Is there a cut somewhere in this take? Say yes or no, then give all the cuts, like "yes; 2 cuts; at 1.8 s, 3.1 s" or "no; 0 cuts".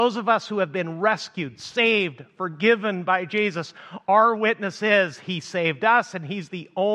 no; 0 cuts